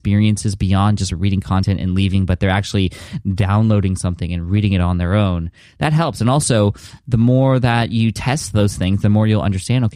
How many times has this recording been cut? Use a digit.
0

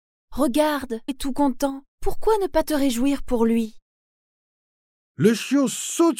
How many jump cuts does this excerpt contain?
1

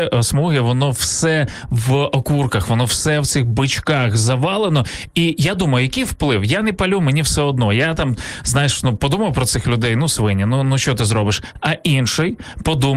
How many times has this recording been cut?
0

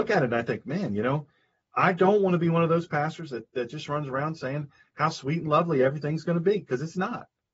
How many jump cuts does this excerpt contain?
0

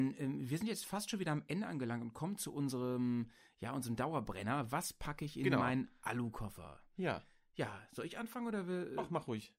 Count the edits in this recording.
0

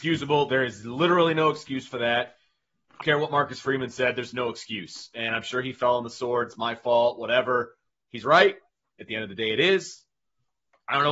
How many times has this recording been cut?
1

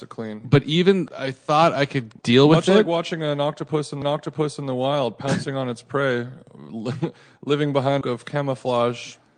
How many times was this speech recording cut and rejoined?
4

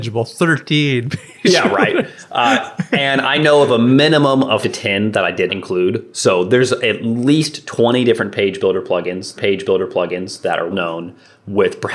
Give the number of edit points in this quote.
4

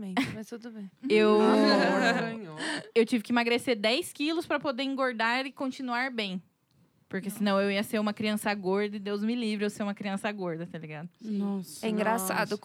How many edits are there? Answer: 0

